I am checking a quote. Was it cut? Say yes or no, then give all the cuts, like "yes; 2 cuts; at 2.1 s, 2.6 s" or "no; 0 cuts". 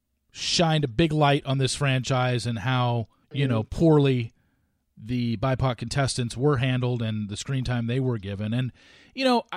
yes; 1 cut; at 3.2 s